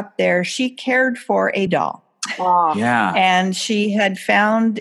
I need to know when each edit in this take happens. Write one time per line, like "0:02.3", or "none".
0:01.7